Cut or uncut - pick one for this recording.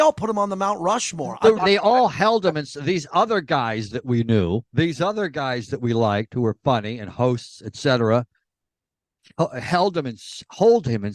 cut